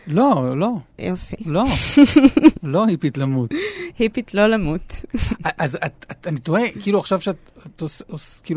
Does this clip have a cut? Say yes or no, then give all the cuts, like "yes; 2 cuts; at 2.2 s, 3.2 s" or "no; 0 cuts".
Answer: yes; 1 cut; at 0.9 s